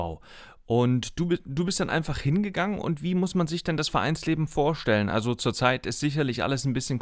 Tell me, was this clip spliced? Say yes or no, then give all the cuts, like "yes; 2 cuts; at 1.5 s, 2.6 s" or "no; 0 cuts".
no; 0 cuts